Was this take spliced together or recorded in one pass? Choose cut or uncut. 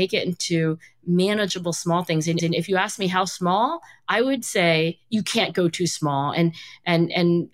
cut